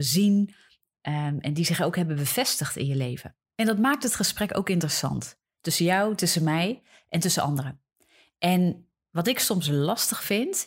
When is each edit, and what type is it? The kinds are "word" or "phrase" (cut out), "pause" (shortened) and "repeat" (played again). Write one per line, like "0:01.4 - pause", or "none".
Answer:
none